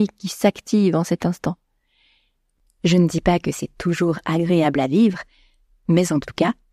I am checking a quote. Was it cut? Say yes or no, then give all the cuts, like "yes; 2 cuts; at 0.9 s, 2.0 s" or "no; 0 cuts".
no; 0 cuts